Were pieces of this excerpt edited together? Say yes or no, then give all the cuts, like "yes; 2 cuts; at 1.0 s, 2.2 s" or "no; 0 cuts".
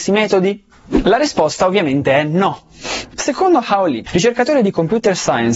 no; 0 cuts